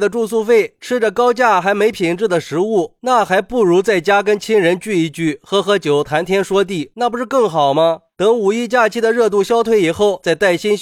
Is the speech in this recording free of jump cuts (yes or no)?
yes